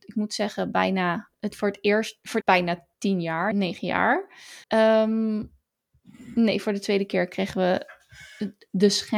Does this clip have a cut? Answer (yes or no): yes